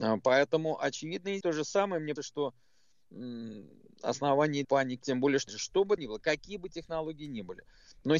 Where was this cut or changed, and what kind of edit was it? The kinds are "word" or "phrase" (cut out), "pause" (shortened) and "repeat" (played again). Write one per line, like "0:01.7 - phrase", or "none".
0:01.4 - word
0:02.2 - word
0:04.6 - word
0:05.0 - word
0:05.5 - word
0:06.0 - word